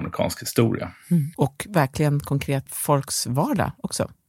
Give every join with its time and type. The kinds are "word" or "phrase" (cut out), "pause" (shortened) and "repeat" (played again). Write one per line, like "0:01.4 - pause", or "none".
0:01.3 - pause
0:02.7 - word